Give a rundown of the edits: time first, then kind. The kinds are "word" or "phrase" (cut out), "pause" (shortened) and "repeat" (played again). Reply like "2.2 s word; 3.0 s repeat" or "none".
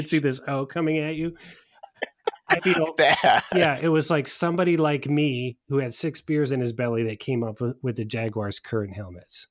2.6 s word